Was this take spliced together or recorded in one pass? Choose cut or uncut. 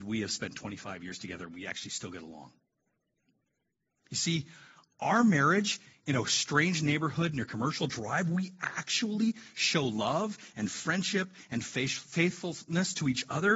uncut